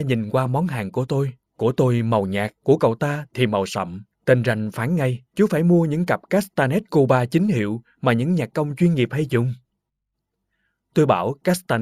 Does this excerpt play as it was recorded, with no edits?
no; 4 cuts; at 1.4 s, 2.6 s, 4.1 s, 5.3 s

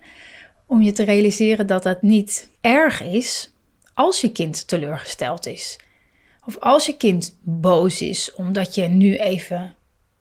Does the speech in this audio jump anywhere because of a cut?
yes; 1 cut; at 2.6 s

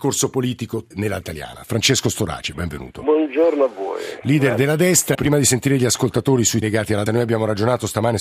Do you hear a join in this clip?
yes; 6 cuts; at 0.9 s, 1.2 s, 2.5 s, 5.1 s, 6.6 s, 7.1 s

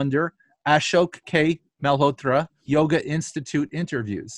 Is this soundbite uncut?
no; 1 cut; at 2.5 s

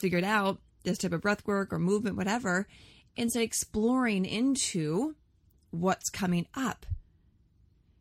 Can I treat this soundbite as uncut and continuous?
yes; 0 cuts

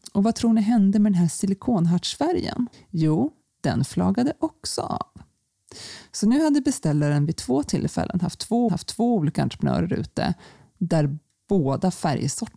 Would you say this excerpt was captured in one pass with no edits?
no; 2 cuts; at 2.7 s, 8.7 s

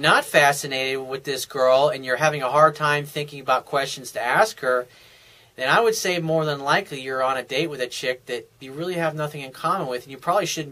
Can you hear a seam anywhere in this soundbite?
no; 0 cuts

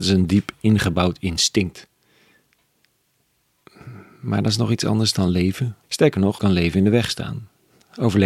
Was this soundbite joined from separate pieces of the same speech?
yes; 2 cuts; at 5.8 s, 6.4 s

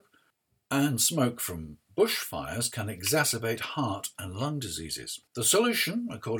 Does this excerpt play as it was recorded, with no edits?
no; 1 cut; at 5.3 s

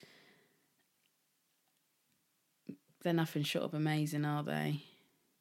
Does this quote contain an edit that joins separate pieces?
no; 0 cuts

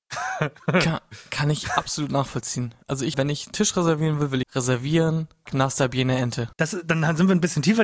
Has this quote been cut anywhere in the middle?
yes; 6 cuts; at 2.8 s, 3.1 s, 3.5 s, 4.4 s, 5.5 s, 6.5 s

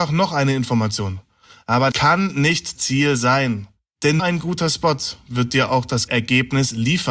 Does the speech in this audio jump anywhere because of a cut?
yes; 4 cuts; at 1.9 s, 2.8 s, 4.2 s, 6.1 s

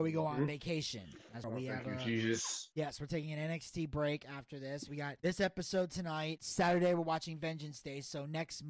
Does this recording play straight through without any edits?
no; 2 cuts; at 1.4 s, 6.4 s

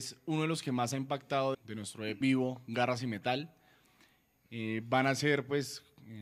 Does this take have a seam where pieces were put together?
yes; 2 cuts; at 1.5 s, 2.2 s

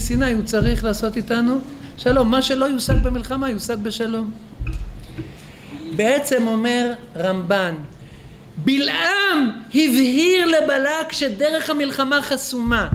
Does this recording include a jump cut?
no; 0 cuts

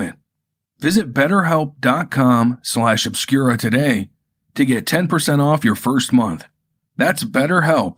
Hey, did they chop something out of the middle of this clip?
no; 0 cuts

